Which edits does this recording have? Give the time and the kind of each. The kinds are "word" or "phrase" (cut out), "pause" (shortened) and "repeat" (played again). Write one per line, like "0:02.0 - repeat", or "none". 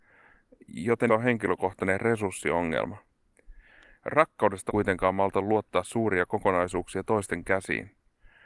0:01.1 - word
0:04.7 - phrase

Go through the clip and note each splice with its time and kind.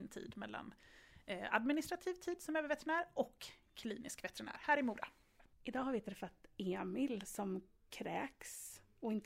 none

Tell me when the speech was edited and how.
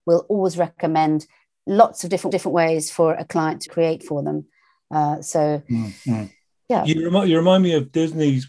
0:02.3 - repeat
0:03.7 - phrase

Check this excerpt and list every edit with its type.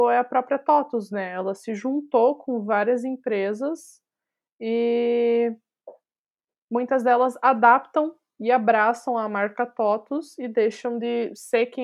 none

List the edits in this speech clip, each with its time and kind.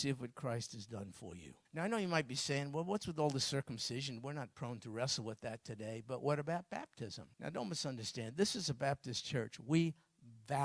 0:01.6 - pause
0:07.3 - pause

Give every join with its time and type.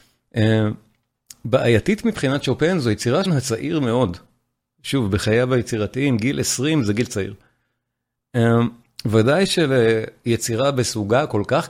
0:03.3 - phrase

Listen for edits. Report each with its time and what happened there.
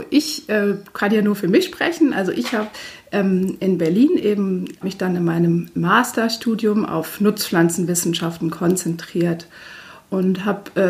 0:04.8 - phrase

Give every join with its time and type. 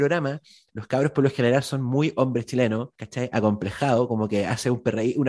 0:02.9 - pause

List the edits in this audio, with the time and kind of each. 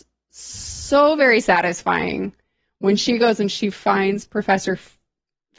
none

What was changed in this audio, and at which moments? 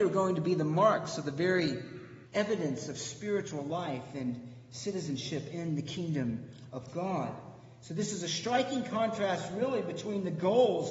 0:02.3 - pause

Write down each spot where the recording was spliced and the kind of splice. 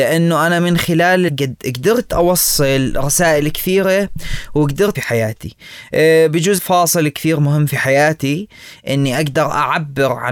0:01.3 - word
0:04.9 - phrase
0:06.6 - phrase

